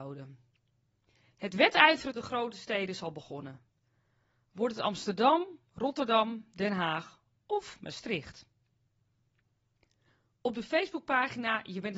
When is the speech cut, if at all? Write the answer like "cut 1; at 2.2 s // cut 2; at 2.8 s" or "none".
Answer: cut 1; at 2.1 s